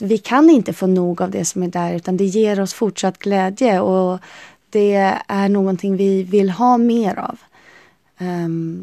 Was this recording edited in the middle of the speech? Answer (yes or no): no